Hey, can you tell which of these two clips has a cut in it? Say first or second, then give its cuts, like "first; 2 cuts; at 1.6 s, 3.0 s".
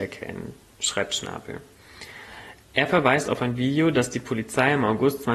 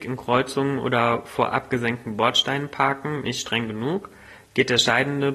first; 1 cut; at 2.6 s